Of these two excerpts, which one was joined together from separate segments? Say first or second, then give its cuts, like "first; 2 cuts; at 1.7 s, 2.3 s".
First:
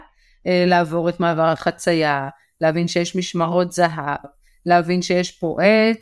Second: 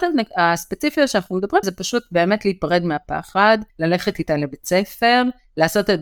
second; 2 cuts; at 1.6 s, 3.7 s